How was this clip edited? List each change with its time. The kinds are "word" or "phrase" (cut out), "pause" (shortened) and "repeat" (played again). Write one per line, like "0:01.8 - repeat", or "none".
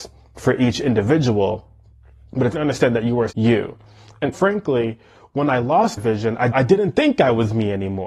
0:02.5 - word
0:03.3 - word
0:04.3 - word
0:06.0 - word
0:06.5 - word